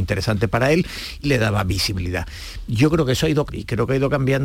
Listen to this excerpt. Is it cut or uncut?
cut